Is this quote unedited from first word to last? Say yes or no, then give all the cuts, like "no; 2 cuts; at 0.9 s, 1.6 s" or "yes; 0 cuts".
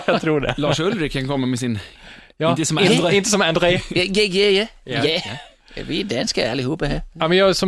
yes; 0 cuts